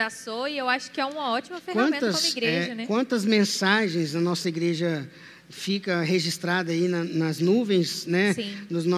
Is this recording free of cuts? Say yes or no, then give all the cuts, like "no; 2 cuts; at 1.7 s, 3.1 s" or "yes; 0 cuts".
yes; 0 cuts